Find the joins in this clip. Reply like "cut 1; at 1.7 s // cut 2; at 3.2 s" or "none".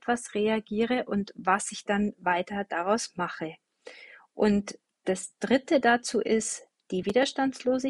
none